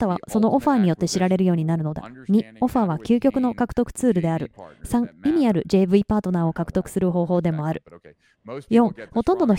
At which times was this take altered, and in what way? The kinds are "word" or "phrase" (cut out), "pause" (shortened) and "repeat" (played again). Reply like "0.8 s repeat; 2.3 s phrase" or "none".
none

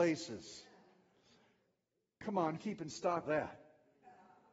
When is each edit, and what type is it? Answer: 2.6 s word; 3.2 s word

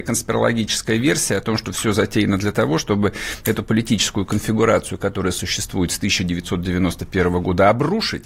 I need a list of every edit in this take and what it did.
none

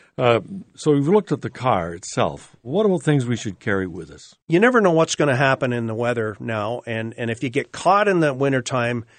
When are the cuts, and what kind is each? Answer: 4.4 s pause

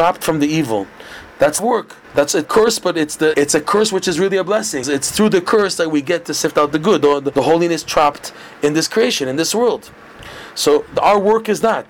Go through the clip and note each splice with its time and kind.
1.6 s phrase; 2.0 s pause; 2.4 s phrase; 3.3 s word; 4.8 s word; 7.3 s word

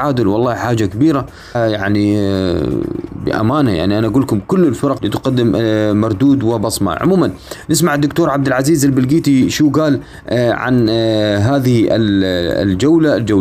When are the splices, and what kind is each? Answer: 1.5 s word; 5.0 s word

